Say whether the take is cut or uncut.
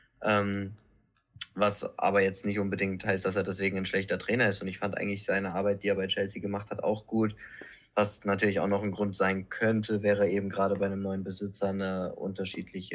uncut